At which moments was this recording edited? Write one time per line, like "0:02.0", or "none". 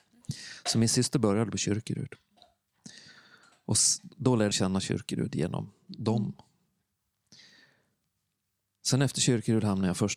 0:04.5